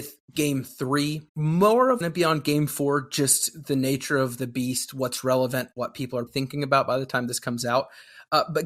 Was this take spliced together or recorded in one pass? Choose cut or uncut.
cut